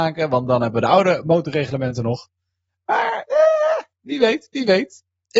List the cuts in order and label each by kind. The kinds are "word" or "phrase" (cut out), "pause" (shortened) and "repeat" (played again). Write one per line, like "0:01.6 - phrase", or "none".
none